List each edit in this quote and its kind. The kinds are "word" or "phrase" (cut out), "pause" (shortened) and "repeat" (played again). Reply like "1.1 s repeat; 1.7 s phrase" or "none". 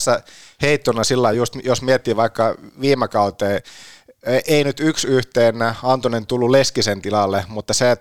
none